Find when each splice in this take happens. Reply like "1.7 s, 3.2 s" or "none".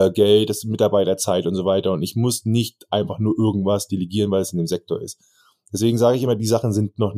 none